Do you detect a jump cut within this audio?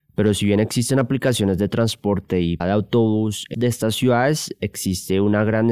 yes; 2 cuts; at 2.6 s, 3.5 s

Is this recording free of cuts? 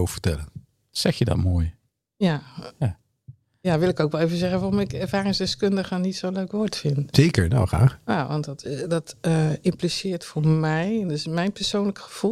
yes; 0 cuts

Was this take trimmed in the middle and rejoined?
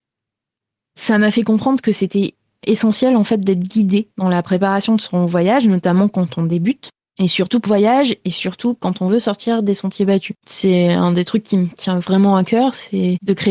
yes; 4 cuts; at 2.6 s, 4.1 s, 7.7 s, 10.4 s

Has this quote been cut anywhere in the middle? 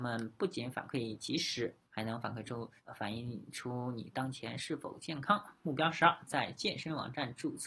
yes; 2 cuts; at 1.9 s, 2.8 s

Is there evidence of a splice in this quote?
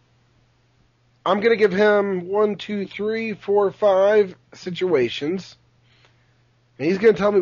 yes; 1 cut; at 4.4 s

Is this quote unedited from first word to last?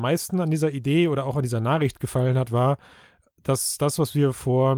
yes; 0 cuts

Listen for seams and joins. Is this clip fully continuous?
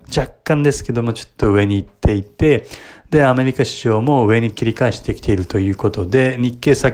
yes; 0 cuts

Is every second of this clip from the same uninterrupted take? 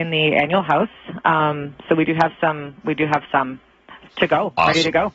yes; 0 cuts

